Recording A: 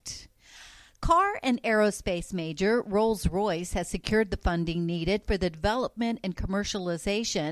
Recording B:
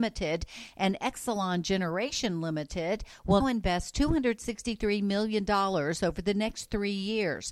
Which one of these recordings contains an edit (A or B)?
B